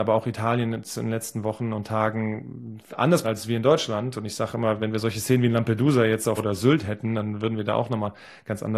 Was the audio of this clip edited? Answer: yes; 3 cuts; at 3.2 s, 4.8 s, 6.4 s

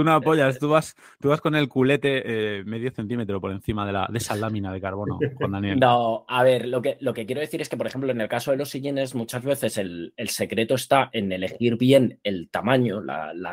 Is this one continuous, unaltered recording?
yes; 0 cuts

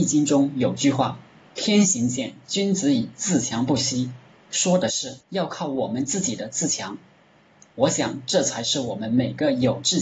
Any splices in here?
yes; 1 cut; at 5.2 s

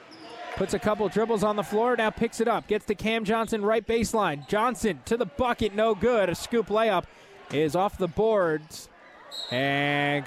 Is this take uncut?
yes; 0 cuts

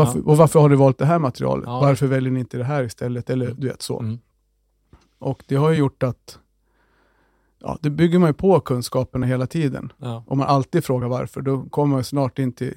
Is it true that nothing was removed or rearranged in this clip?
yes; 0 cuts

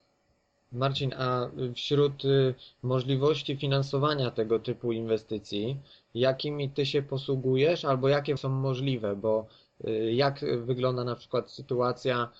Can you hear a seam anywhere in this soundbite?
yes; 1 cut; at 8.4 s

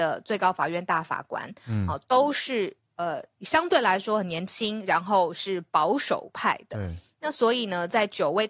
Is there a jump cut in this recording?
yes; 1 cut; at 2.9 s

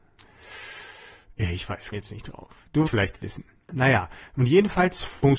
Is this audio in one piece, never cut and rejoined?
no; 2 cuts; at 1.9 s, 2.9 s

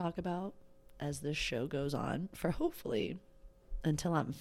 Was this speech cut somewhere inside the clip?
no; 0 cuts

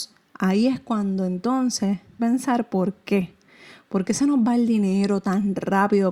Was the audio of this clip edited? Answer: yes; 1 cut; at 2.2 s

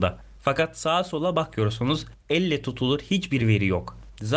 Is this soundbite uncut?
yes; 0 cuts

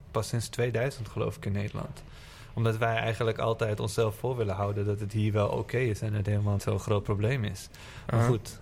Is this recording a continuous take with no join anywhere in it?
no; 1 cut; at 6.6 s

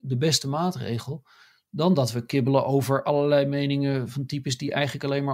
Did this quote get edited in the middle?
no; 0 cuts

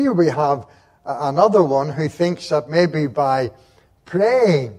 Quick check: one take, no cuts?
yes; 0 cuts

